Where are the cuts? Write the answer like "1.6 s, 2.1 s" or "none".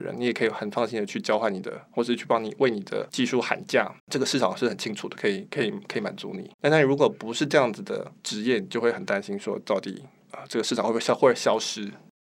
4.0 s, 6.5 s, 8.2 s